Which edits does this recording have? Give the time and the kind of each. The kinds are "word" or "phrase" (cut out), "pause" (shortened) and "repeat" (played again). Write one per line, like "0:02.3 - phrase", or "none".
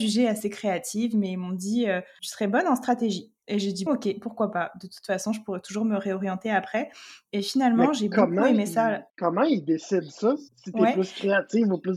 0:02.2 - word
0:03.4 - pause
0:03.9 - word
0:09.1 - pause
0:10.5 - pause